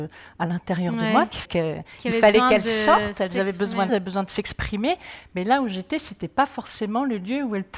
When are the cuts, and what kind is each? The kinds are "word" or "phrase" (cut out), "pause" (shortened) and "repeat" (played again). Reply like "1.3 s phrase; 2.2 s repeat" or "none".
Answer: 1.4 s word; 3.9 s phrase